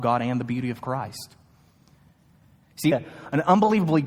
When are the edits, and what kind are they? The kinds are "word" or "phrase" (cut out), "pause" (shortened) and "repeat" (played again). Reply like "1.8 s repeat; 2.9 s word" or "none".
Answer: 2.9 s phrase